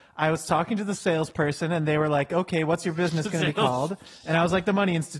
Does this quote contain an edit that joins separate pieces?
no; 0 cuts

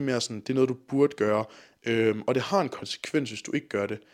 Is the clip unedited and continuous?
yes; 0 cuts

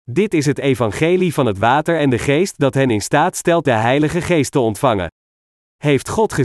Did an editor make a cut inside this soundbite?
no; 0 cuts

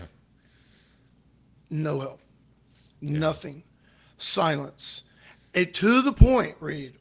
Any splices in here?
no; 0 cuts

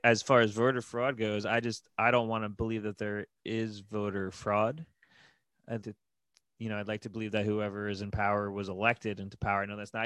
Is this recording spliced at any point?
yes; 2 cuts; at 3.4 s, 5.8 s

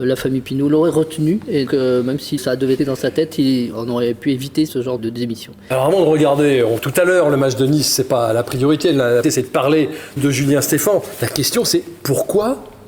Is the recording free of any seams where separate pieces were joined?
no; 9 cuts; at 1.7 s, 2.4 s, 2.8 s, 3.7 s, 4.7 s, 5.0 s, 6.8 s, 9.2 s, 10.2 s

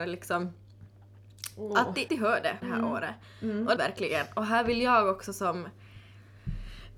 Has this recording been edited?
yes; 3 cuts; at 2.1 s, 2.6 s, 3.8 s

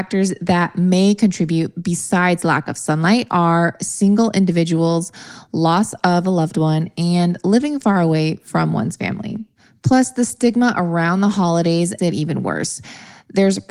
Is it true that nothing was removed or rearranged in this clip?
no; 1 cut; at 12.0 s

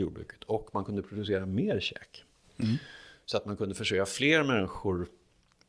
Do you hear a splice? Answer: no; 0 cuts

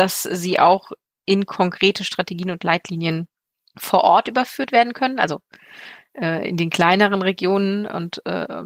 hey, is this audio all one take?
yes; 0 cuts

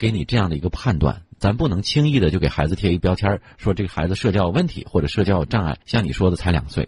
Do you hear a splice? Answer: yes; 1 cut; at 5.8 s

